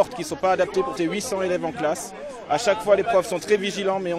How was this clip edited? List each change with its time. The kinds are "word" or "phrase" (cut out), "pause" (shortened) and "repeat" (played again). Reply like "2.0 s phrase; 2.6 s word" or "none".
1.0 s phrase